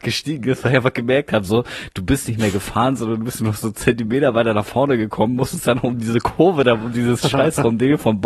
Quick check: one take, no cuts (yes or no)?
yes